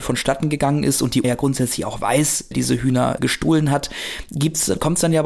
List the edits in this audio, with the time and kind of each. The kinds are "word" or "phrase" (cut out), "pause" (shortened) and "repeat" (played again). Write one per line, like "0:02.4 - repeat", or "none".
0:01.2 - word
0:02.5 - word
0:03.2 - word